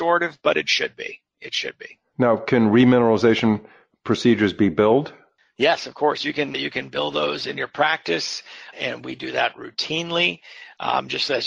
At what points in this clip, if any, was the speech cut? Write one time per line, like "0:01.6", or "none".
0:06.5
0:08.7